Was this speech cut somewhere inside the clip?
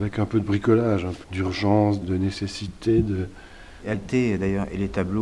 yes; 3 cuts; at 1.2 s, 2.0 s, 3.9 s

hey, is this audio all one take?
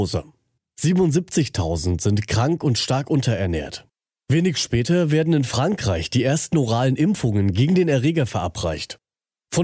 yes; 0 cuts

